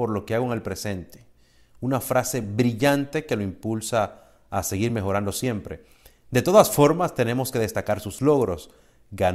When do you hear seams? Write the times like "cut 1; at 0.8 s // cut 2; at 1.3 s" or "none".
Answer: none